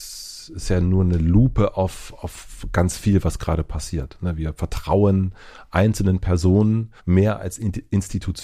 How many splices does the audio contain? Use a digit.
1